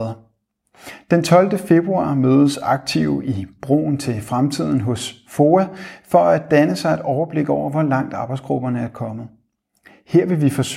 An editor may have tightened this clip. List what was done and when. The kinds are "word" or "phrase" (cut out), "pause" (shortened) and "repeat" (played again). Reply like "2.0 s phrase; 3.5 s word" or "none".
none